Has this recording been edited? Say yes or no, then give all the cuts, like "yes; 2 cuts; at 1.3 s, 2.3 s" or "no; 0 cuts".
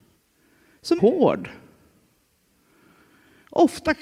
yes; 1 cut; at 1.0 s